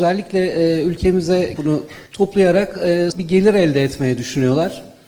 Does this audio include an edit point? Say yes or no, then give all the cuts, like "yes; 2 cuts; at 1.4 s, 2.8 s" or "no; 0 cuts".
yes; 3 cuts; at 1.6 s, 2.1 s, 3.1 s